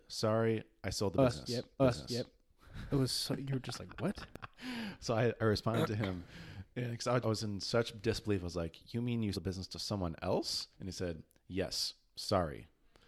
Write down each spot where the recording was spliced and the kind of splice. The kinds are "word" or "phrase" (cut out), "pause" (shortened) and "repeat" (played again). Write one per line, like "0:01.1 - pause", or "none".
0:01.8 - repeat
0:07.2 - word
0:09.3 - word
0:10.7 - pause